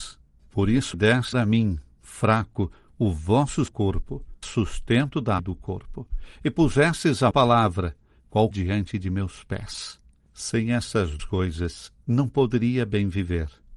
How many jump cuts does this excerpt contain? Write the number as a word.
eight